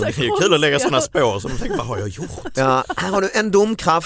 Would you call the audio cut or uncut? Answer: uncut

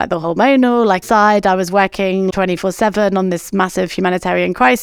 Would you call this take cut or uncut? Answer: cut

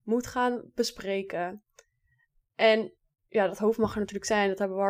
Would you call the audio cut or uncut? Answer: uncut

